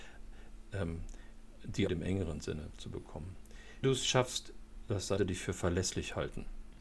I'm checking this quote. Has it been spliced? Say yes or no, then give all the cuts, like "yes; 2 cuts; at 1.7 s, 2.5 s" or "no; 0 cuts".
yes; 3 cuts; at 1.9 s, 3.8 s, 5.2 s